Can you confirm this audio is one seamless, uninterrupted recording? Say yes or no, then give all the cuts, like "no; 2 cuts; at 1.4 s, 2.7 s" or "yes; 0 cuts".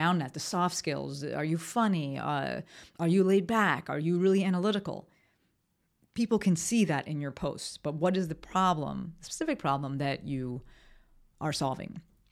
yes; 0 cuts